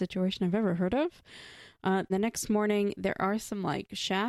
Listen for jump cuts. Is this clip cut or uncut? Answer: cut